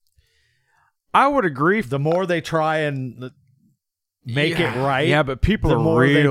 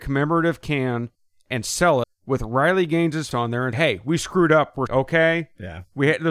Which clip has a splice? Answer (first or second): second